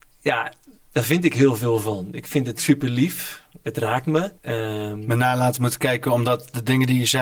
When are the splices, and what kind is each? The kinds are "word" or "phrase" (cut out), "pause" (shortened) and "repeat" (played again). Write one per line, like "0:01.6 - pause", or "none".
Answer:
0:04.4 - pause